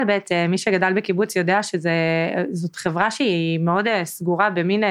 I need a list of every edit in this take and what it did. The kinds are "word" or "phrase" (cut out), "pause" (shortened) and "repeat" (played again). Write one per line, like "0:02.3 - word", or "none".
none